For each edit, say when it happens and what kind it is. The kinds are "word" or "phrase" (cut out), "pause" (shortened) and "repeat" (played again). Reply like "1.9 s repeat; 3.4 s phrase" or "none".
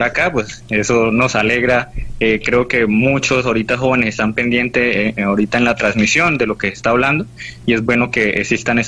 none